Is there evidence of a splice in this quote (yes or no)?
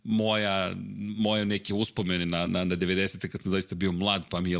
no